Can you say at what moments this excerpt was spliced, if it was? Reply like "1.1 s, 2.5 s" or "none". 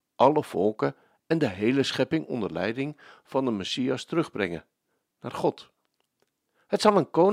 none

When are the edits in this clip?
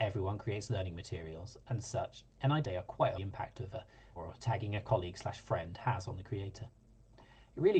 2.3 s, 2.6 s, 3.2 s, 4.2 s

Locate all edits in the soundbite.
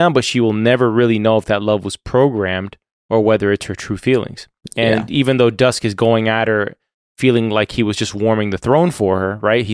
none

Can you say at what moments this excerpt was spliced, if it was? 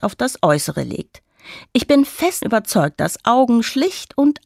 2.4 s

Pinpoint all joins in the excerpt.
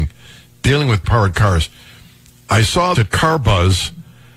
1.0 s, 2.9 s

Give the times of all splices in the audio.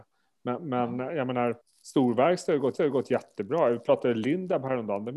1.6 s, 2.8 s

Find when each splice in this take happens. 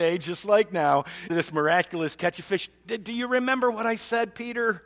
1.3 s

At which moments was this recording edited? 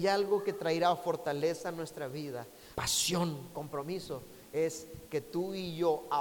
2.8 s

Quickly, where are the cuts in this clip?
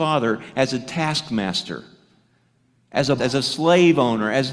3.2 s

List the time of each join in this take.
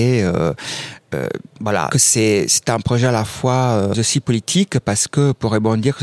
1.9 s, 3.9 s

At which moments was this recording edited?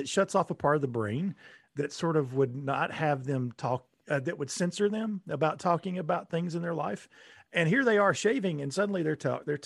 none

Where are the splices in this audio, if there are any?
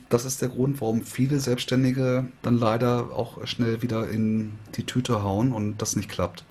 none

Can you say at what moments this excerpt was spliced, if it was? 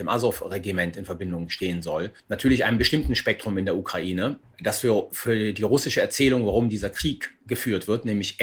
2.2 s, 4.4 s, 7.4 s

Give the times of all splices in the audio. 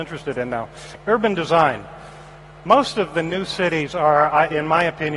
none

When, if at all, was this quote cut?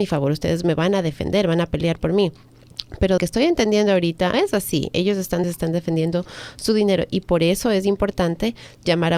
3.2 s, 4.3 s, 5.4 s

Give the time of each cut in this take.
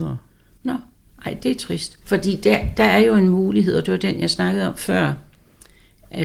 2.0 s

